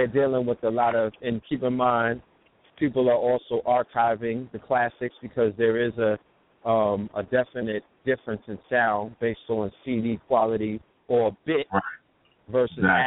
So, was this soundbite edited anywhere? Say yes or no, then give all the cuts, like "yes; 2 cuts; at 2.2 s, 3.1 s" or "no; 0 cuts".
yes; 1 cut; at 1.2 s